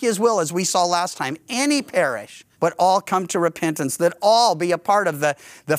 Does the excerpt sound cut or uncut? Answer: cut